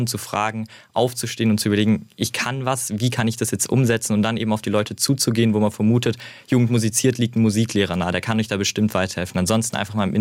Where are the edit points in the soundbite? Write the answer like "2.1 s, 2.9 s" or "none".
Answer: none